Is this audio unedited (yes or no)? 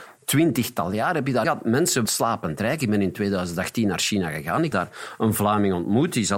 no